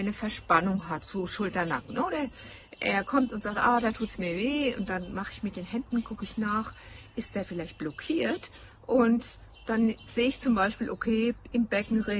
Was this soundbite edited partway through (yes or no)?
no